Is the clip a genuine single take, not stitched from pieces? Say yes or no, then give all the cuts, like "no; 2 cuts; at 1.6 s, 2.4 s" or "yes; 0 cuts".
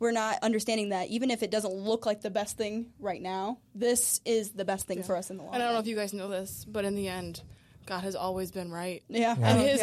yes; 0 cuts